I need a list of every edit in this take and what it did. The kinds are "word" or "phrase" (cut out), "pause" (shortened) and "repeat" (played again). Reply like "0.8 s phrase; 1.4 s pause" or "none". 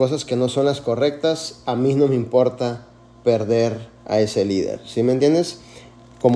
none